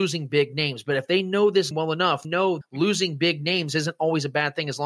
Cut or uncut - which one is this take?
cut